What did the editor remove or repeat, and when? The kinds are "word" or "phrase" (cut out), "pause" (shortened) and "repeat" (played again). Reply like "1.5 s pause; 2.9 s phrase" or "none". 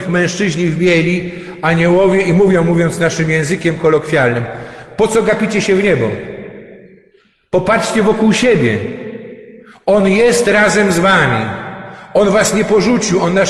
none